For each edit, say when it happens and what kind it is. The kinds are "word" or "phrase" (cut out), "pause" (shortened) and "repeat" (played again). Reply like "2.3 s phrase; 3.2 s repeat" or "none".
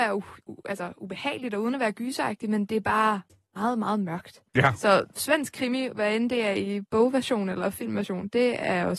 3.3 s pause; 4.5 s pause